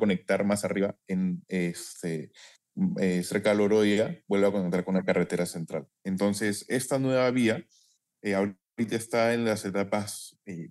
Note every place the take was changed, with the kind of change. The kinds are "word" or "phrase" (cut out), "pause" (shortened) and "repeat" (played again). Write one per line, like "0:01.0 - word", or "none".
0:06.0 - pause